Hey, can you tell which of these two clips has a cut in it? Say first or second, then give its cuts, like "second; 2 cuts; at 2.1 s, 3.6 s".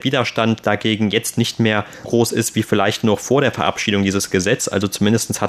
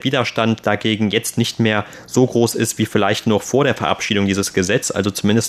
first; 1 cut; at 2.0 s